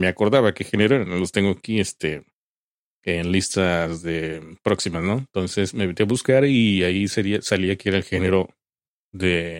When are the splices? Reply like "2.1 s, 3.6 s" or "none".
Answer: none

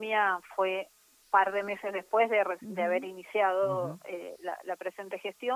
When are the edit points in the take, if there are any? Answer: none

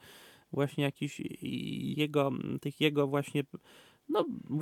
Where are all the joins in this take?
1.9 s

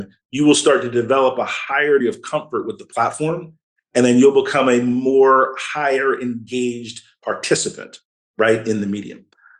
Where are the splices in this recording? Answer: 2.0 s

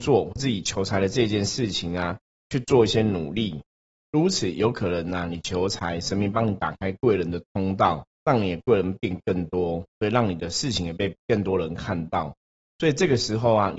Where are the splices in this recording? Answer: 8.1 s, 9.9 s

